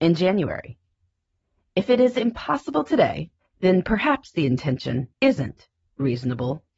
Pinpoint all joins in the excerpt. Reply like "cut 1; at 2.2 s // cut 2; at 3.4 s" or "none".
cut 1; at 3.4 s // cut 2; at 5.1 s